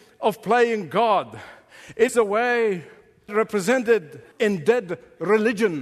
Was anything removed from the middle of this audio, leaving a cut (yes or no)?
yes